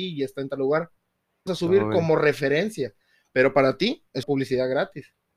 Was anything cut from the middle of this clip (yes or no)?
yes